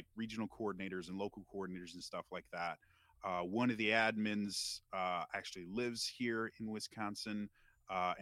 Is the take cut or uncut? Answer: uncut